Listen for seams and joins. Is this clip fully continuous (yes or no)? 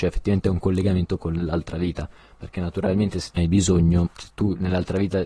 no